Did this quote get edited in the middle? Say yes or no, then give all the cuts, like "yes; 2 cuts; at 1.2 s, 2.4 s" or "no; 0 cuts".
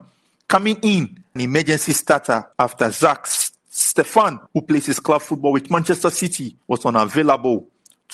yes; 4 cuts; at 1.4 s, 2.5 s, 4.5 s, 6.6 s